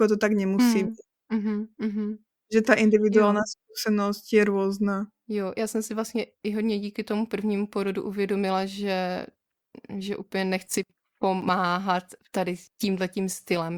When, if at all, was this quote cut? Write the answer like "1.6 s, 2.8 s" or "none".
none